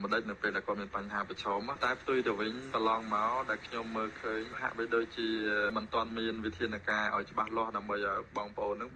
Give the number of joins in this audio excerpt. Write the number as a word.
zero